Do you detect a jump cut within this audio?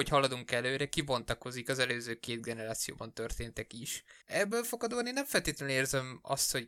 yes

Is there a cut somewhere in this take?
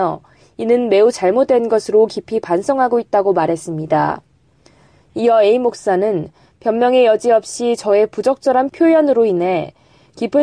no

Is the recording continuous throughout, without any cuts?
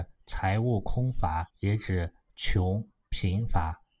no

